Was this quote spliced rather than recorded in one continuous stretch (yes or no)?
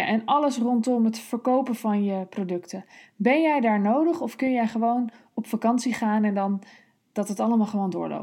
no